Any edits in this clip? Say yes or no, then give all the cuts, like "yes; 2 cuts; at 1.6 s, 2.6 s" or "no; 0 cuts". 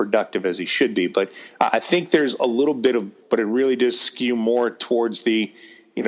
yes; 1 cut; at 3.2 s